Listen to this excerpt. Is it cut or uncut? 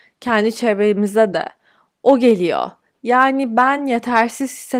uncut